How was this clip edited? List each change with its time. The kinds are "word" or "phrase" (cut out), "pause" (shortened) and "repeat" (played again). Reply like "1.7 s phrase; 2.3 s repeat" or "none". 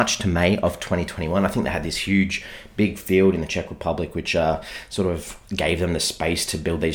none